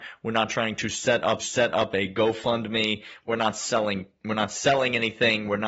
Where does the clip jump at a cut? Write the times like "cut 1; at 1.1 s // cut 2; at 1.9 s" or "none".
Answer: cut 1; at 1.4 s